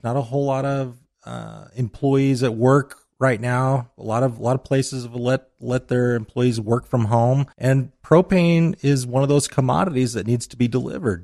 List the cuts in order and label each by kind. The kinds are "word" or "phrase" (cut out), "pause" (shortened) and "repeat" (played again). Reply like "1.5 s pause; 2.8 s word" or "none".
7.5 s pause